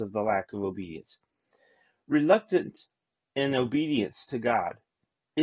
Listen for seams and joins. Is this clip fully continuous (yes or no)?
yes